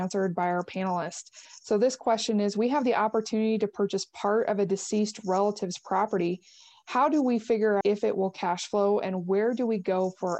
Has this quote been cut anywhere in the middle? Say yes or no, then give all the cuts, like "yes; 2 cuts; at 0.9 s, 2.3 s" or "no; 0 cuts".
yes; 1 cut; at 7.8 s